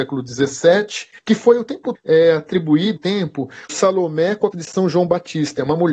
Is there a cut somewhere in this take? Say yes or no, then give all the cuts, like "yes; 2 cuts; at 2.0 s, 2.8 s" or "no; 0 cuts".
yes; 5 cuts; at 1.2 s, 1.9 s, 3.0 s, 3.7 s, 4.5 s